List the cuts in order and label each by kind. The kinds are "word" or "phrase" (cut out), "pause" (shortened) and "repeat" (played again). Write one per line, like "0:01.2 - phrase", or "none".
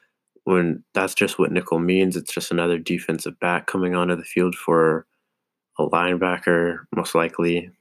none